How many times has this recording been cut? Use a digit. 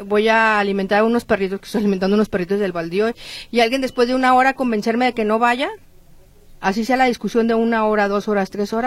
1